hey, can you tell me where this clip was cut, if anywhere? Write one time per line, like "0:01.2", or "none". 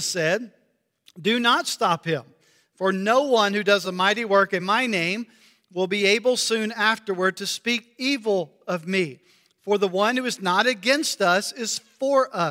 none